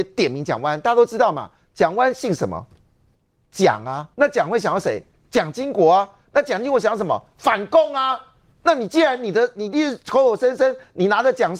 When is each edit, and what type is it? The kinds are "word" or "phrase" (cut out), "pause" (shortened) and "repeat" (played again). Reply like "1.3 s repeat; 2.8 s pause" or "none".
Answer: 4.1 s pause